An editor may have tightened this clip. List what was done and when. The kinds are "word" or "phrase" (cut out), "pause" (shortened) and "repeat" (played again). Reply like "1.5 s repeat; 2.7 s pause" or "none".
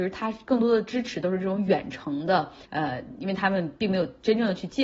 2.6 s pause